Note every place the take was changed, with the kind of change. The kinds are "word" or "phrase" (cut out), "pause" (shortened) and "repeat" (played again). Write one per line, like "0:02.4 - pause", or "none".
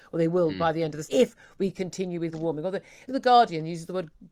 0:01.0 - word
0:02.3 - word
0:03.1 - word